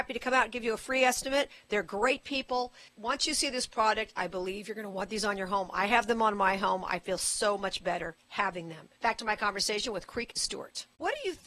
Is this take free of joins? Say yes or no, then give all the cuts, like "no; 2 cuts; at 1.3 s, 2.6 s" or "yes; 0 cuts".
no; 2 cuts; at 2.9 s, 9.0 s